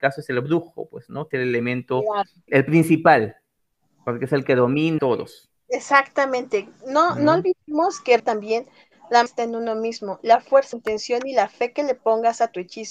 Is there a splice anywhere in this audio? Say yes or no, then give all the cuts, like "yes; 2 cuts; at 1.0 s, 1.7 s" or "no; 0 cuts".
yes; 6 cuts; at 1.3 s, 2.5 s, 5.0 s, 8.2 s, 9.3 s, 10.7 s